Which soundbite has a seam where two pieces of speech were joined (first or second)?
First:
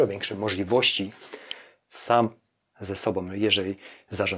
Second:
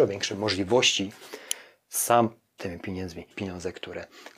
second